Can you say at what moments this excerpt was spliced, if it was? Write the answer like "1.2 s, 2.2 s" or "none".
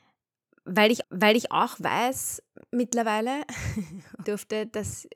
1.0 s, 4.2 s